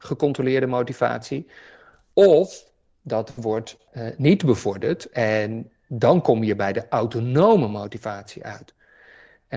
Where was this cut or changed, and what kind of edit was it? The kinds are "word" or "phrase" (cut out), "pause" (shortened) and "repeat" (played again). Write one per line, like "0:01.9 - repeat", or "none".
none

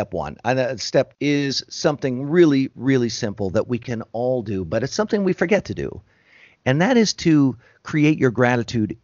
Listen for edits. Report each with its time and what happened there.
0:01.1 - word

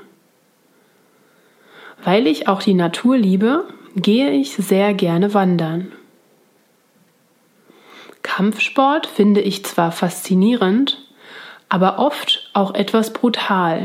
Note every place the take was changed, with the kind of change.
none

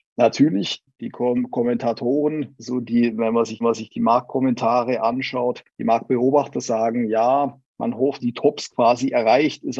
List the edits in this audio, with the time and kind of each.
0:03.6 - repeat
0:05.7 - pause
0:07.7 - pause
0:08.2 - phrase

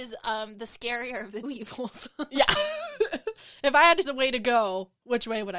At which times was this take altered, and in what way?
0:01.4 - word
0:04.0 - word

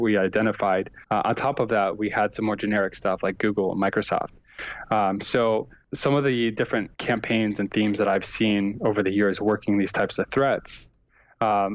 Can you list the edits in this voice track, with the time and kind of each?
0:01.0 - pause
0:06.9 - pause

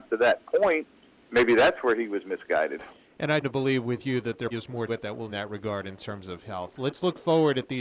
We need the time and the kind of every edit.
0:03.4 - word
0:04.5 - word
0:04.9 - word
0:05.3 - phrase

